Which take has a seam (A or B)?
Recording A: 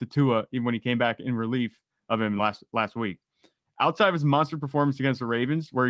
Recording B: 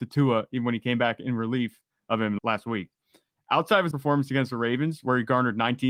B